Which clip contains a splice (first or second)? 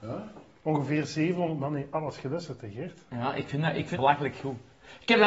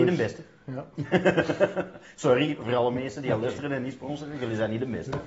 first